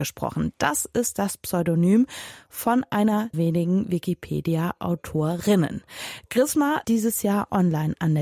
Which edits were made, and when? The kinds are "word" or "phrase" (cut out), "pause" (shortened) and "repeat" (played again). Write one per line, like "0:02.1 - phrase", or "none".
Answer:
0:03.3 - word
0:06.8 - word

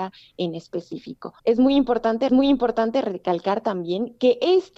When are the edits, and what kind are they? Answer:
0:01.4 - pause
0:02.3 - repeat

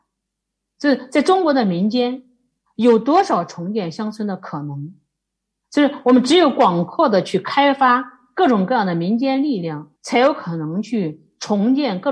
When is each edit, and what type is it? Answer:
0:10.0 - pause

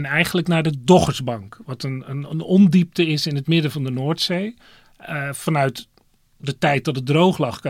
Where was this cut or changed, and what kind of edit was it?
none

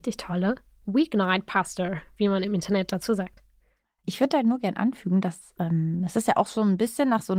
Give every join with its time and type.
none

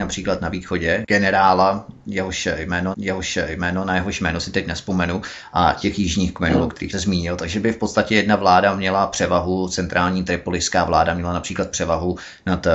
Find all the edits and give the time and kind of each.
0:02.9 - repeat
0:06.9 - word

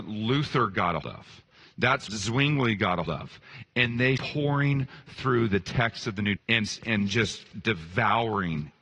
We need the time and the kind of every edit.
0:01.0 - word
0:02.1 - word
0:03.0 - word
0:04.2 - word
0:06.4 - word
0:06.8 - word

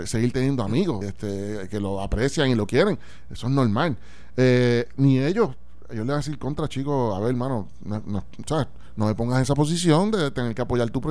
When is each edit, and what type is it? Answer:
0:01.0 - word

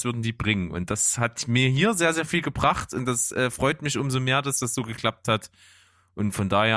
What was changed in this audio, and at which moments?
none

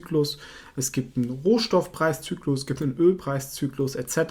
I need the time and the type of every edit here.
none

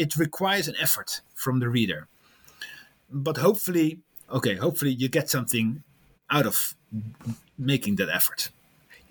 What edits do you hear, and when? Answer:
0:04.3 - word

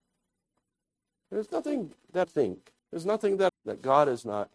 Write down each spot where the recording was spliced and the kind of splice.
0:02.2 - word
0:02.8 - pause
0:03.5 - phrase

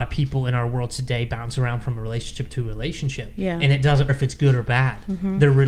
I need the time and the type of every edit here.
0:04.1 - word

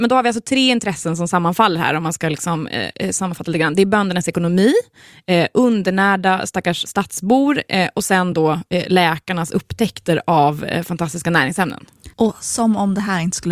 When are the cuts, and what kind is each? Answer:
0:12.1 - pause

